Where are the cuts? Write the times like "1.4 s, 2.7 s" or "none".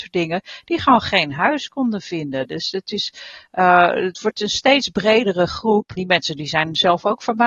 none